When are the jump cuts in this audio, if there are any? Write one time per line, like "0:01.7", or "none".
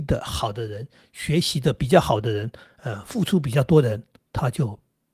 none